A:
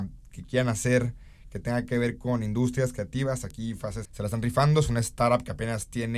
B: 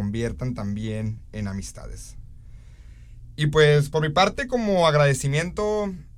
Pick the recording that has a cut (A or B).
A